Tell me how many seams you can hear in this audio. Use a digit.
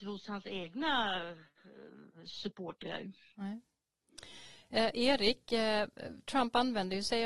0